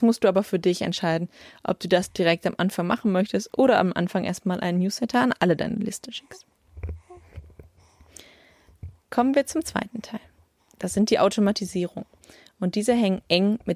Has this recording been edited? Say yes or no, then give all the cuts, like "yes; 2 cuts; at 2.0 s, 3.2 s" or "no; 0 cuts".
no; 0 cuts